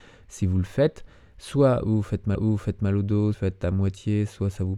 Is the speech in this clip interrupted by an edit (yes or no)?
yes